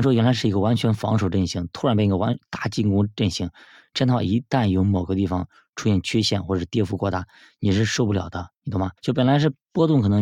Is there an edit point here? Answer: yes; 1 cut; at 9.0 s

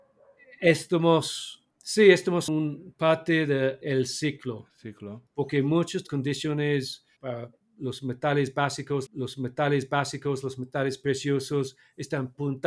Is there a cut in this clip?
yes; 7 cuts; at 1.7 s, 2.5 s, 3.8 s, 5.3 s, 6.1 s, 7.2 s, 9.1 s

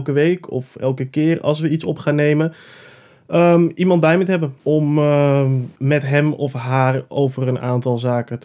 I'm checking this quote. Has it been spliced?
yes; 2 cuts; at 4.6 s, 5.8 s

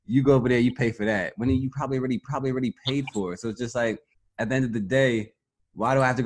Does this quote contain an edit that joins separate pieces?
yes; 2 cuts; at 2.2 s, 4.1 s

